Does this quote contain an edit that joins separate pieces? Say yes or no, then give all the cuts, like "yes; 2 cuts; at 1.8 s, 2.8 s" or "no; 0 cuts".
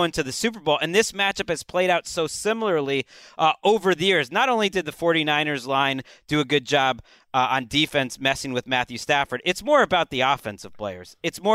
no; 0 cuts